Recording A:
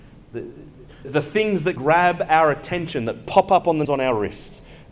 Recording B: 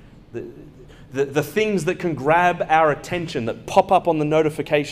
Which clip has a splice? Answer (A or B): A